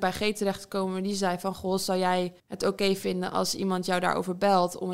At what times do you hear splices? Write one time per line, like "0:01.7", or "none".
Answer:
0:02.4